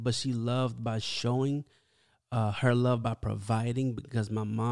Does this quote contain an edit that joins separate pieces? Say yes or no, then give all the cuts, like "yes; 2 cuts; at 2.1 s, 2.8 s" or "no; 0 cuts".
no; 0 cuts